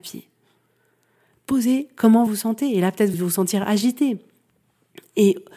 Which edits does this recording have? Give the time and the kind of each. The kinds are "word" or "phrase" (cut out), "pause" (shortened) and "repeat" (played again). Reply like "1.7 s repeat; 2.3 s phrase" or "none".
2.3 s word; 3.1 s word